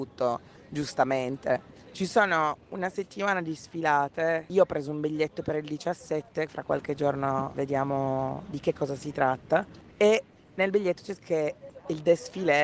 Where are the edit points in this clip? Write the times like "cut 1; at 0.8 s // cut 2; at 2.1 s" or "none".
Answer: cut 1; at 6.5 s // cut 2; at 7.5 s // cut 3; at 11.2 s

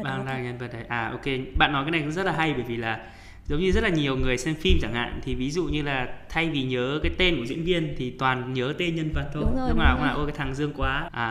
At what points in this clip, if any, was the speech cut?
none

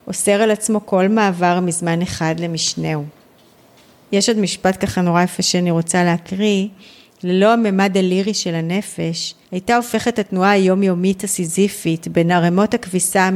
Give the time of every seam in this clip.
cut 1; at 9.4 s

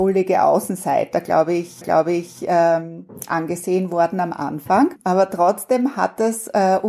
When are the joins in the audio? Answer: cut 1; at 1.8 s

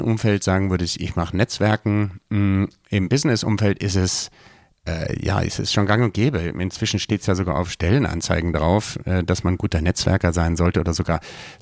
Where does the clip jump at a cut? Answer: none

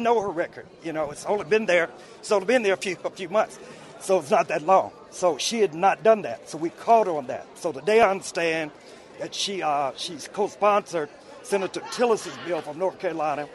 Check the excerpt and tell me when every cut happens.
none

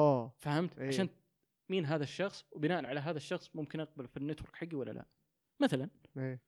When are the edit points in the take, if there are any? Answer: none

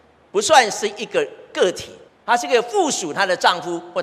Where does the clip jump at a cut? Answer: cut 1; at 2.1 s

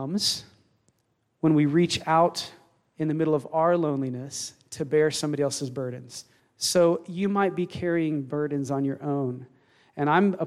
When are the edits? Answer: cut 1; at 6.4 s

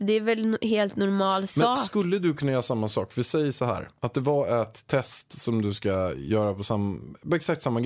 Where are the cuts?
none

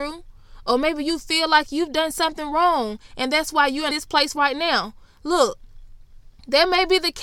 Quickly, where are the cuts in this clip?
none

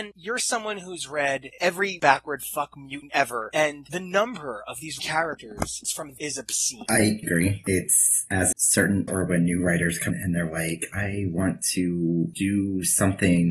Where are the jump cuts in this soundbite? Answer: cut 1; at 2.0 s // cut 2; at 3.1 s // cut 3; at 5.0 s // cut 4; at 6.2 s // cut 5; at 7.2 s // cut 6; at 8.5 s // cut 7; at 9.1 s // cut 8; at 10.1 s

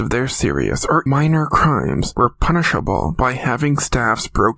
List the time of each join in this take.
cut 1; at 1.1 s

